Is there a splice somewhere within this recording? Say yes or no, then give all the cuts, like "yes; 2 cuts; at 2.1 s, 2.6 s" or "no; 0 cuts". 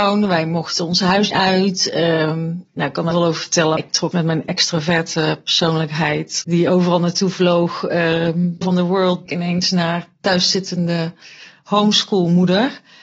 yes; 7 cuts; at 1.3 s, 3.1 s, 3.8 s, 4.1 s, 6.4 s, 8.6 s, 9.3 s